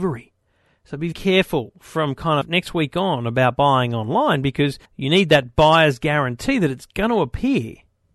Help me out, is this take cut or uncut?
cut